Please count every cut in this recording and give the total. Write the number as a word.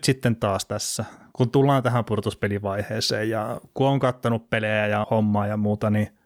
one